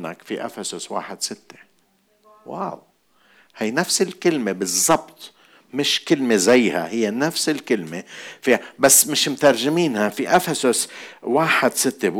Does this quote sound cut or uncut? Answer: uncut